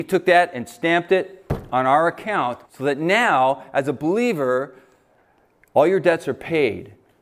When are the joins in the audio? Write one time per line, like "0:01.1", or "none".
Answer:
0:02.6